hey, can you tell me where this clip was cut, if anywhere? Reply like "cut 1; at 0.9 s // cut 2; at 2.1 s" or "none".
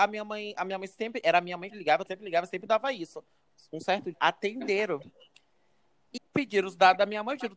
cut 1; at 1.7 s // cut 2; at 2.1 s // cut 3; at 4.1 s // cut 4; at 6.2 s